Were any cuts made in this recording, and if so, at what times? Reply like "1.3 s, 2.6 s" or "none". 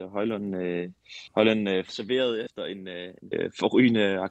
1.3 s, 1.9 s, 3.3 s

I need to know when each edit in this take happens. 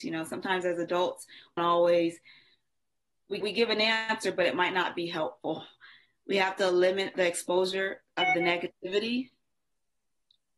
1.6 s, 3.4 s, 7.1 s

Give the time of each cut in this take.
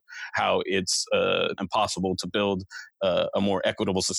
1.6 s, 2.9 s

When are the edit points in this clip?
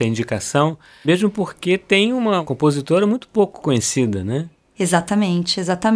none

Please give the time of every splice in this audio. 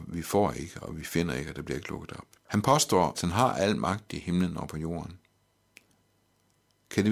2.4 s, 3.1 s

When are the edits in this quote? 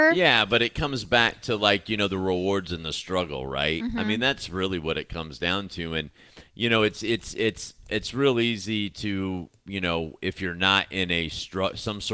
9.6 s

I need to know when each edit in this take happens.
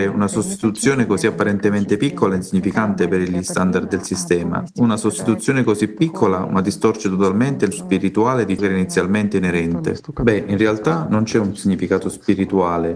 7.7 s, 8.6 s

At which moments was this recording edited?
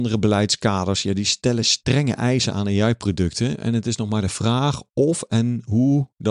none

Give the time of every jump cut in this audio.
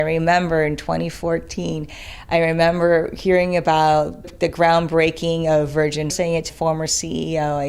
4.2 s, 6.1 s, 6.5 s

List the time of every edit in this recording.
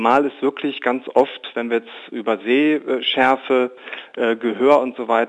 none

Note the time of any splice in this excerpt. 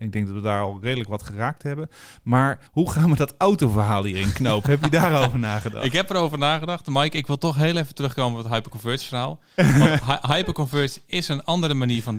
2.7 s

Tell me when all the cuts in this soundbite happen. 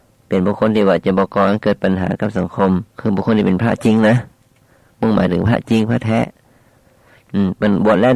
2.9 s

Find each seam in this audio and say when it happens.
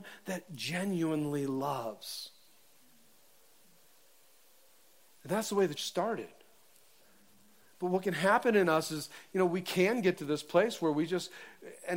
5.8 s

